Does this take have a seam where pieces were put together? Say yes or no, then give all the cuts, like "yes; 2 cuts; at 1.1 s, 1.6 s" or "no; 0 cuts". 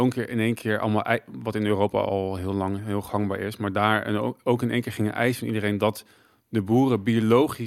no; 0 cuts